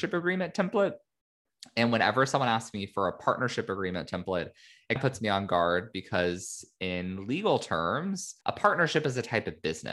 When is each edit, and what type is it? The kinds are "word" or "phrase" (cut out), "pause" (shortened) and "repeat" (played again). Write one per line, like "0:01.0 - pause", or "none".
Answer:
0:05.0 - word
0:08.4 - pause